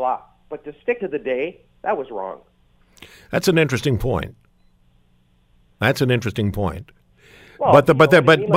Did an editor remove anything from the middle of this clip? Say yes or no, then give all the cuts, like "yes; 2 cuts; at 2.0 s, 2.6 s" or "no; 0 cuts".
yes; 1 cut; at 1.0 s